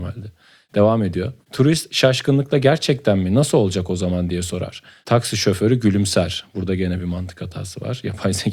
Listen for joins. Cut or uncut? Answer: uncut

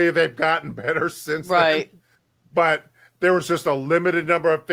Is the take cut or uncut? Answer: uncut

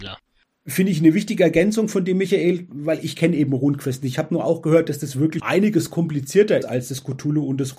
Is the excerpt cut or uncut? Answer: cut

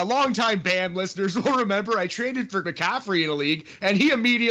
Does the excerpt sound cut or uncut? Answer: cut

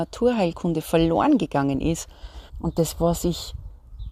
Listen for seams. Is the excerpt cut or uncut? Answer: cut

